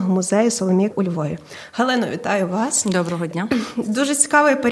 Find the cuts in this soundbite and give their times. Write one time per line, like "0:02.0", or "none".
0:00.9